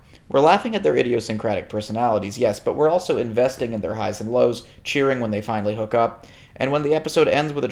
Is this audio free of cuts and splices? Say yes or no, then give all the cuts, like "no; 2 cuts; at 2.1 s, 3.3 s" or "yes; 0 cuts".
yes; 0 cuts